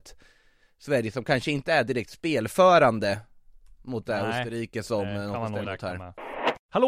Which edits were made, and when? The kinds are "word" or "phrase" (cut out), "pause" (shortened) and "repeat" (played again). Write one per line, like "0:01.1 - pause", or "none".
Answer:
0:05.6 - word